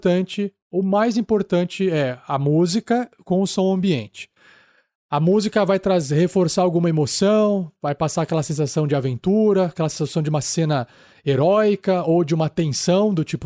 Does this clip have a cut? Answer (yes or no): no